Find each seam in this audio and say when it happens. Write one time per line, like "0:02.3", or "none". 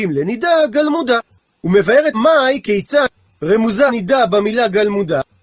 0:02.1
0:03.9